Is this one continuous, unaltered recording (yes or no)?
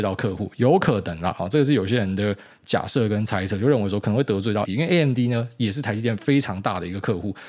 no